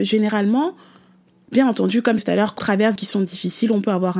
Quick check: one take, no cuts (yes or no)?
no